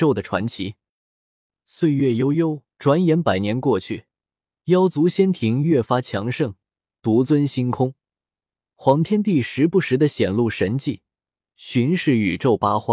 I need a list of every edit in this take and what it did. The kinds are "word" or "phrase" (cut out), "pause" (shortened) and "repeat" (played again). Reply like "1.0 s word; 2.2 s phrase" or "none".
2.7 s pause